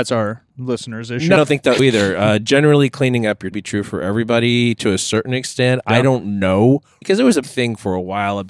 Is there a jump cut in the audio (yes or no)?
yes